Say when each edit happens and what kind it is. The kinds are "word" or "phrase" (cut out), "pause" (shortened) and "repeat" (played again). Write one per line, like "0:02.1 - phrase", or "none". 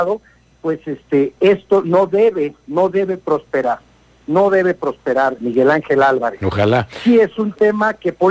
0:05.4 - word